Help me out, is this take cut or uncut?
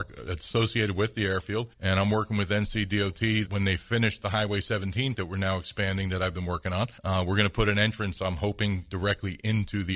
cut